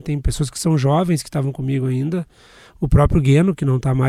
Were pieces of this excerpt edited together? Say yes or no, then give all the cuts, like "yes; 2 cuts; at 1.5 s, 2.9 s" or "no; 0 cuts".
no; 0 cuts